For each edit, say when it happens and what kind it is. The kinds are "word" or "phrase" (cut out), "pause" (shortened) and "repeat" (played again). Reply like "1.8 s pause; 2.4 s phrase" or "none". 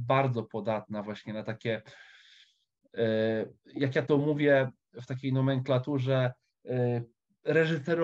3.6 s pause